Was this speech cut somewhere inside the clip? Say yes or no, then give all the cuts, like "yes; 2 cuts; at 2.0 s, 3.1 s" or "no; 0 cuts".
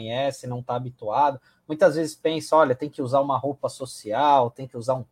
no; 0 cuts